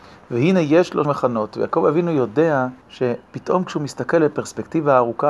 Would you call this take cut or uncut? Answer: cut